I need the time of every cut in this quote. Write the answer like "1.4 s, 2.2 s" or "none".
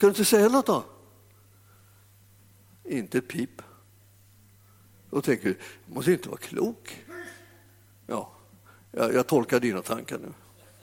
none